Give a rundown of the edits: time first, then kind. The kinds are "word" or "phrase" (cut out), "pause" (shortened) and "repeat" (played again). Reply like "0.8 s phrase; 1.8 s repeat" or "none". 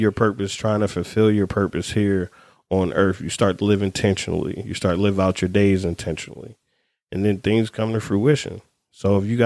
none